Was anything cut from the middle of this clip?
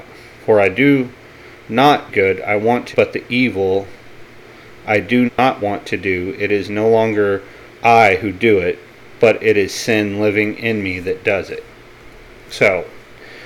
yes; 4 cuts; at 2.1 s, 2.9 s, 5.3 s, 7.7 s

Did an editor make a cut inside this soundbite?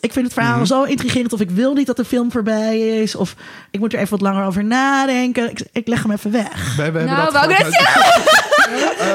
no; 0 cuts

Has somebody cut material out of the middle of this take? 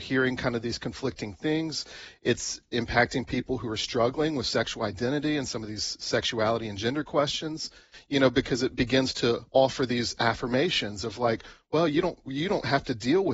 no; 0 cuts

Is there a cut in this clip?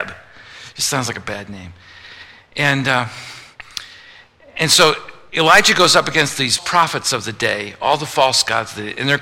yes; 1 cut; at 6.6 s

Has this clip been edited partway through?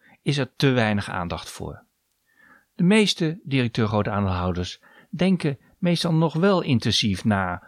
no; 0 cuts

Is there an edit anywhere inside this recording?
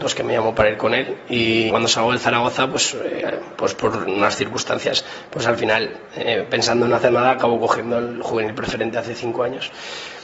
yes; 1 cut; at 1.7 s

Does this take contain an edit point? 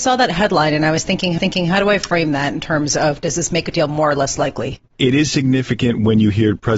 yes; 2 cuts; at 1.4 s, 3.7 s

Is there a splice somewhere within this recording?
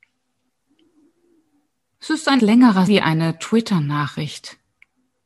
yes; 2 cuts; at 2.4 s, 2.9 s

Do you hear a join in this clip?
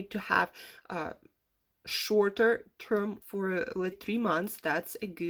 yes; 2 cuts; at 3.2 s, 3.9 s

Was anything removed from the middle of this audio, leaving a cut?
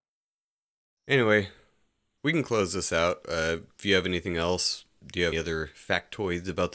yes; 1 cut; at 5.3 s

